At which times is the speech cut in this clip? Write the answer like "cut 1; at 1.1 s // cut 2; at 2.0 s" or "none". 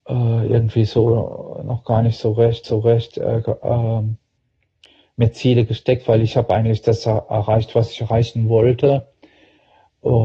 cut 1; at 2.6 s